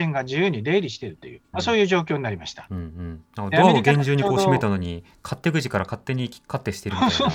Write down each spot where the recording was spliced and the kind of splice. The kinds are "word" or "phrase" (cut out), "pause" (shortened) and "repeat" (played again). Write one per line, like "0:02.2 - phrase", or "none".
0:01.5 - phrase

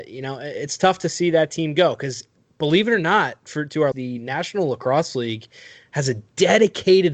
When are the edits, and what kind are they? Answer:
0:03.9 - word

